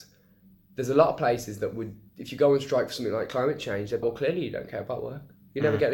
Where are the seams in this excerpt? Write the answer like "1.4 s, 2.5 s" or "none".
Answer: 4.0 s